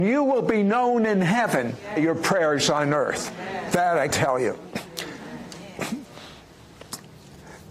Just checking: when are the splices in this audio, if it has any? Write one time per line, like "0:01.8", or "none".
0:02.0
0:04.1